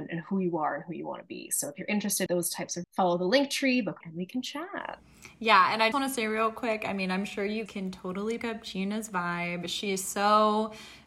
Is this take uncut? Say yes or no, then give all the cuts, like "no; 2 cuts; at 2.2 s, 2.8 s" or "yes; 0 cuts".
no; 6 cuts; at 2.3 s, 2.8 s, 4.0 s, 5.9 s, 7.7 s, 8.4 s